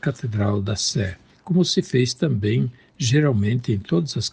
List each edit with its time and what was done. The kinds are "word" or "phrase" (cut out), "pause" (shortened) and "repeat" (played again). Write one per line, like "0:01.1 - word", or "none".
none